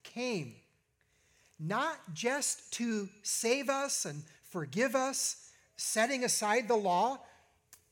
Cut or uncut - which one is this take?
uncut